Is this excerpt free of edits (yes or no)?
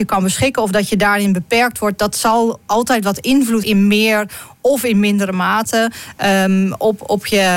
no